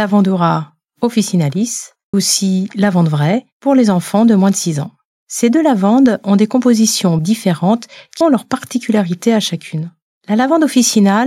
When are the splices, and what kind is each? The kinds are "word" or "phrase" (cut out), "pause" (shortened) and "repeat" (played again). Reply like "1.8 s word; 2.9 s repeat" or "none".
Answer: 2.1 s word; 7.2 s word; 8.2 s word